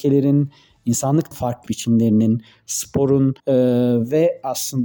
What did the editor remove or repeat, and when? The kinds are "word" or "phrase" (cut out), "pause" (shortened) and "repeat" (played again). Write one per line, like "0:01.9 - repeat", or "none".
0:01.3 - word
0:01.7 - phrase
0:03.4 - pause

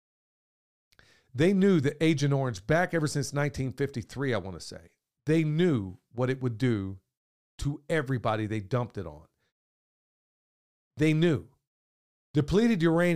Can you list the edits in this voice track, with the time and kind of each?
none

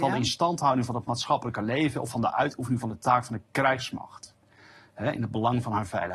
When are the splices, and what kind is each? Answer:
none

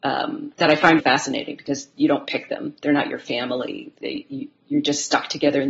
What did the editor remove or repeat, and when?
0:01.0 - word

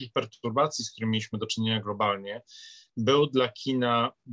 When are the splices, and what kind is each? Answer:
none

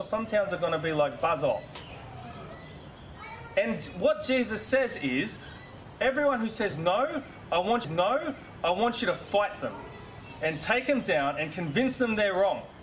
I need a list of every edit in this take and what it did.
0:07.8 - repeat

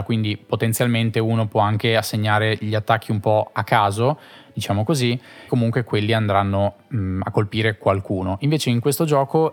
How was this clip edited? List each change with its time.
0:05.5 - phrase

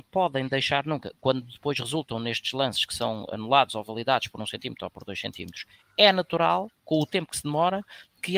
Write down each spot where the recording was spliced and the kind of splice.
none

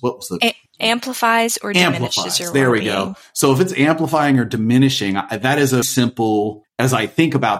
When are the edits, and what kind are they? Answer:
0:05.8 - word

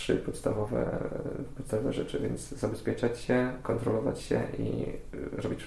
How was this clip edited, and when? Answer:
none

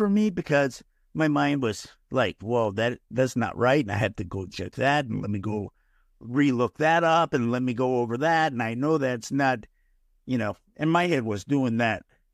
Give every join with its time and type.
none

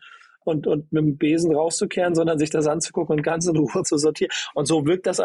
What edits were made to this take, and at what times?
0:03.8 - word

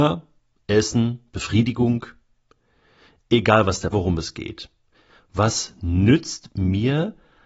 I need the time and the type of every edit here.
0:03.9 - phrase

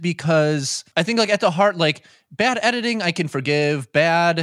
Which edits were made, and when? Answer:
0:00.9 - pause

